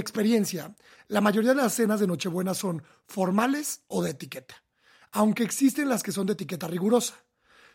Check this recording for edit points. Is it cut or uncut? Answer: uncut